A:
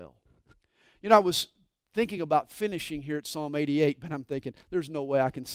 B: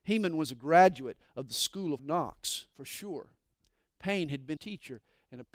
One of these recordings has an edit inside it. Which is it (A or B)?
B